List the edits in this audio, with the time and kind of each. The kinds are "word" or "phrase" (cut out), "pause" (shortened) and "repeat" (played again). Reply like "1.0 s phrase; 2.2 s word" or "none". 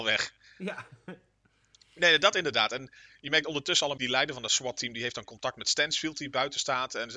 4.0 s word